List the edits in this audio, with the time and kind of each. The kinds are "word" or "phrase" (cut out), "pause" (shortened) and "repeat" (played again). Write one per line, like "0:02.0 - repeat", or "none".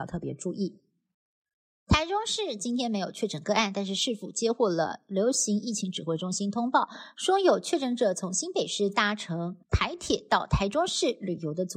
0:09.6 - pause